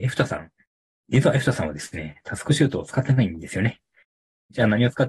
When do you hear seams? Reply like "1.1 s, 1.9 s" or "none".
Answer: none